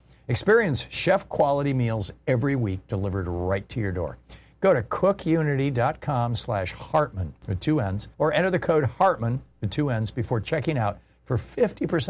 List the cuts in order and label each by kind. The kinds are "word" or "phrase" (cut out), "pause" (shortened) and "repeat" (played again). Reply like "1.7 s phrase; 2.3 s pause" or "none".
8.1 s pause